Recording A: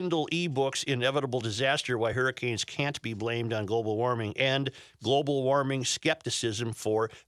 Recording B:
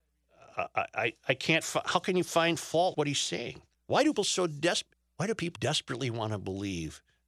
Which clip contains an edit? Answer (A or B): B